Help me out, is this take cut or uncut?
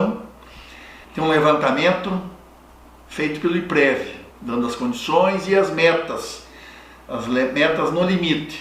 cut